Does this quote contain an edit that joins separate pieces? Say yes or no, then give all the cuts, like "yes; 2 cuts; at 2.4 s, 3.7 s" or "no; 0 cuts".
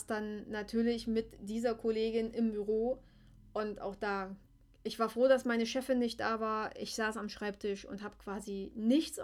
no; 0 cuts